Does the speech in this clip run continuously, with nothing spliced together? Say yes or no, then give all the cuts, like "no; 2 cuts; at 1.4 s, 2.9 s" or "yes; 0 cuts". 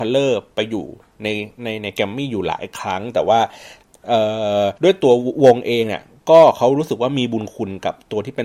no; 1 cut; at 4.8 s